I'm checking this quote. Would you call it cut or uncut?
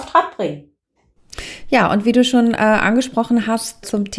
uncut